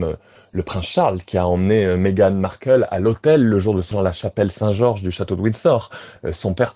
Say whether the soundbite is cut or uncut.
cut